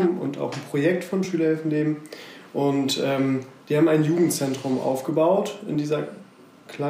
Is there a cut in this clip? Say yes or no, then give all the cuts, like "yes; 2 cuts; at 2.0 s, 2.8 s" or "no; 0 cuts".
no; 0 cuts